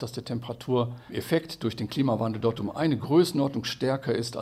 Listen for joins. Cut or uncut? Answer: uncut